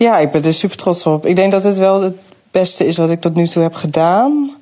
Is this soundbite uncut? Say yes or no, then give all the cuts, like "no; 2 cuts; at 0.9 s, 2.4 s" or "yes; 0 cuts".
yes; 0 cuts